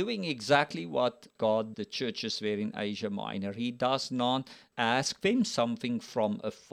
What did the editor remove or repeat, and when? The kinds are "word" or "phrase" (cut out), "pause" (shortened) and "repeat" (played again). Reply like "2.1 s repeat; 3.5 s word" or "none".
1.7 s phrase; 4.7 s word